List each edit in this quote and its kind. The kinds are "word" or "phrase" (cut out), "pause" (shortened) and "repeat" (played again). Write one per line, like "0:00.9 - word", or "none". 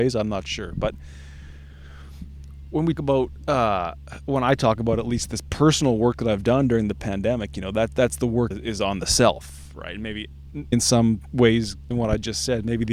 0:03.0 - word
0:08.5 - phrase
0:10.7 - word
0:11.9 - word

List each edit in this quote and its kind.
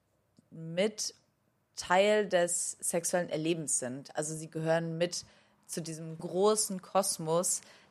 0:06.2 - word

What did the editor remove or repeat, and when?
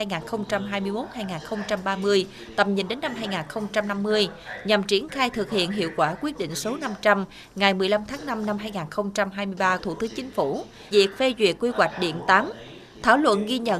0:09.8 - word
0:10.9 - word

